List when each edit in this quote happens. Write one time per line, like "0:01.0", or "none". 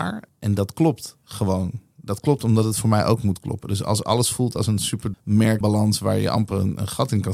0:05.1
0:05.6